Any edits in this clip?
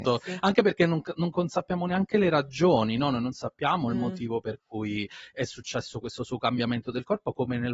no; 0 cuts

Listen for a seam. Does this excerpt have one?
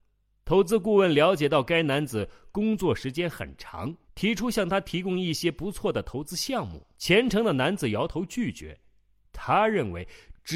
yes; 2 cuts; at 4.0 s, 6.9 s

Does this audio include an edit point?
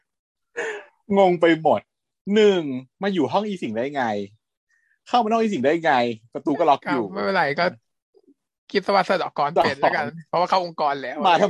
no; 0 cuts

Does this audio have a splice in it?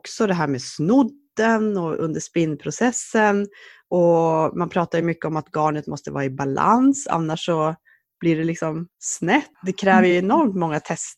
no; 0 cuts

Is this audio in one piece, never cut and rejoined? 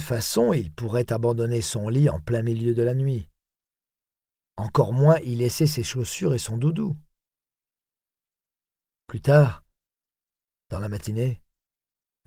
yes; 0 cuts

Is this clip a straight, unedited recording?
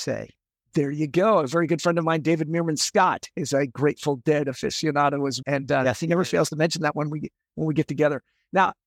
no; 1 cut; at 5.4 s

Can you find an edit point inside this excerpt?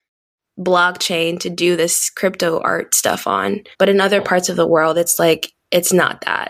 yes; 1 cut; at 3.7 s

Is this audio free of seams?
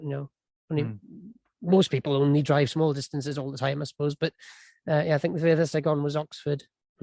yes; 0 cuts

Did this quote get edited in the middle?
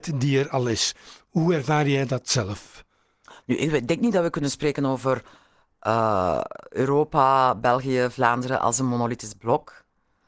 no; 0 cuts

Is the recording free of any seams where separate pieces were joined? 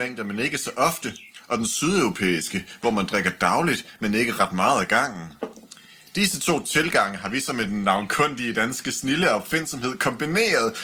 yes; 0 cuts

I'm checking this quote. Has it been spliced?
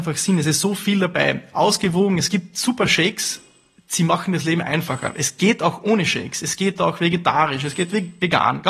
no; 0 cuts

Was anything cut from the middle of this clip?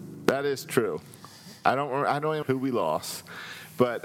yes; 1 cut; at 2.4 s

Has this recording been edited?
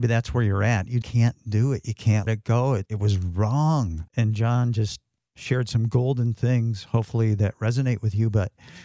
yes; 4 cuts; at 1.0 s, 2.3 s, 2.9 s, 4.1 s

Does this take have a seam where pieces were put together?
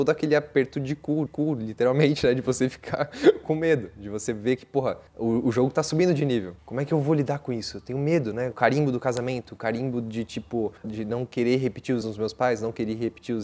yes; 4 cuts; at 1.3 s, 5.1 s, 10.8 s, 12.0 s

